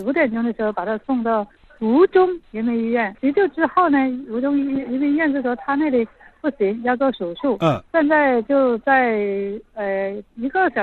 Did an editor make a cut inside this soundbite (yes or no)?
yes